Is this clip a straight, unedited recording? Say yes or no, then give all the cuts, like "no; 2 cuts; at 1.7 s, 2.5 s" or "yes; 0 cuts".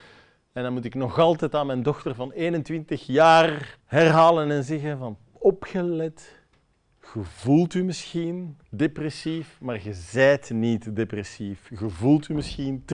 no; 3 cuts; at 3.8 s, 6.6 s, 8.6 s